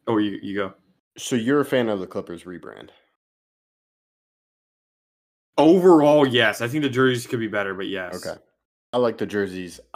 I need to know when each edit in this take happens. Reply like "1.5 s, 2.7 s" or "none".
none